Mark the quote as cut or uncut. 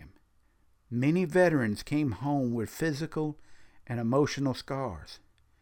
uncut